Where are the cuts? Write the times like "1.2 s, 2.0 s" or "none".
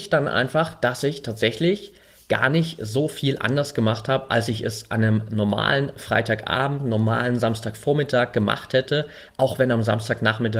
none